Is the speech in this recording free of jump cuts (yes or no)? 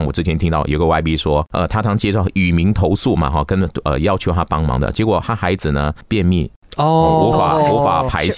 yes